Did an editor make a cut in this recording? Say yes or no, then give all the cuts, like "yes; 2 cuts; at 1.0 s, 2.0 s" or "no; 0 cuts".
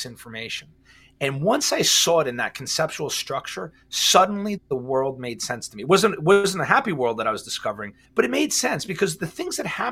yes; 2 cuts; at 4.6 s, 8.0 s